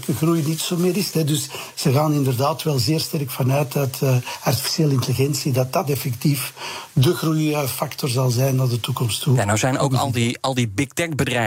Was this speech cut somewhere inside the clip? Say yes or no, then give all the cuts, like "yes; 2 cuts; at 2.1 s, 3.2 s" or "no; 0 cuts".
no; 0 cuts